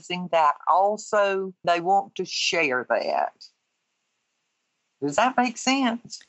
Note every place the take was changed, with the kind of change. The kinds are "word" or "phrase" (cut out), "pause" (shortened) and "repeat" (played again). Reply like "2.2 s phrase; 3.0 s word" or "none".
1.6 s word